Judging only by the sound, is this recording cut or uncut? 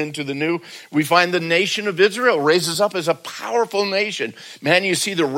uncut